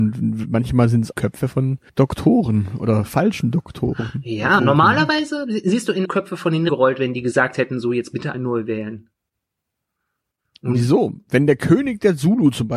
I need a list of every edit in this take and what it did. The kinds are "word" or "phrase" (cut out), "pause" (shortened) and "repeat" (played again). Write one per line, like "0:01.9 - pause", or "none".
0:01.1 - word
0:01.9 - pause
0:04.6 - word
0:06.0 - phrase
0:06.7 - word
0:08.3 - word

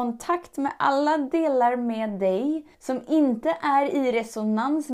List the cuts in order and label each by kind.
0:02.7 - pause

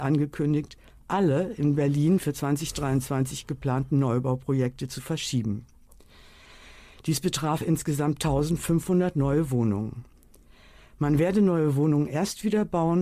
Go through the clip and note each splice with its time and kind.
none

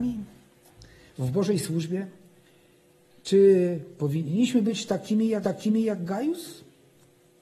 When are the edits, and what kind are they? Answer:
0:05.4 - repeat

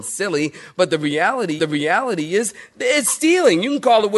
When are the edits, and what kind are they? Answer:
0:01.6 - repeat

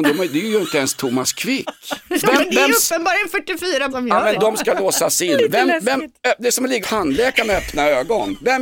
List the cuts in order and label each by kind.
0:02.1 - pause
0:03.9 - word
0:04.3 - word
0:06.8 - word

